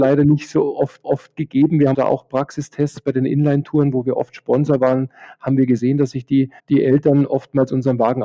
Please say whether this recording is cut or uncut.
cut